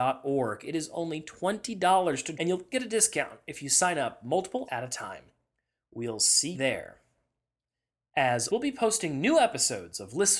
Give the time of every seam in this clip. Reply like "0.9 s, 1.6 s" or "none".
2.3 s, 2.7 s, 4.7 s, 6.5 s, 8.5 s